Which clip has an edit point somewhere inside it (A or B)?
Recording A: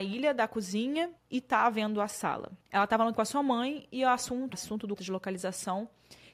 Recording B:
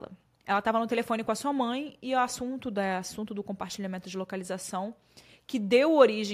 A